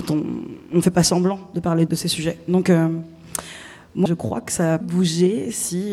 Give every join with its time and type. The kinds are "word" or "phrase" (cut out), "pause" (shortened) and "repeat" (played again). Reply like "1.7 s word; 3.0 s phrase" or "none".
1.9 s word; 4.1 s word; 4.8 s word